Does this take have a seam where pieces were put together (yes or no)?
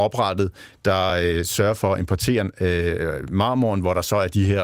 no